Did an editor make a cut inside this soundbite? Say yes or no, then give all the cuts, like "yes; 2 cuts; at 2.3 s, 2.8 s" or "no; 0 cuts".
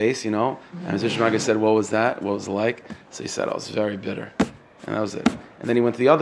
no; 0 cuts